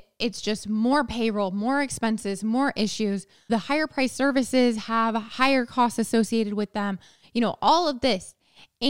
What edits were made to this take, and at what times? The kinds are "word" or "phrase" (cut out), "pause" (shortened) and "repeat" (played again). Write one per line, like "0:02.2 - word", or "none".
none